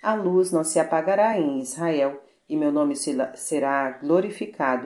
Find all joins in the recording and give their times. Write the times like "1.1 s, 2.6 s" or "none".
none